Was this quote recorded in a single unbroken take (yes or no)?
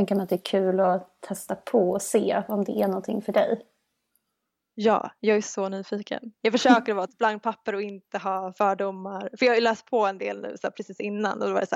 yes